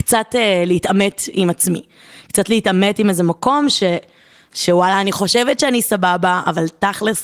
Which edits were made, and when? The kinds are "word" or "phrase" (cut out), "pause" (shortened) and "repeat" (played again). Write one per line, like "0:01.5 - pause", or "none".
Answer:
none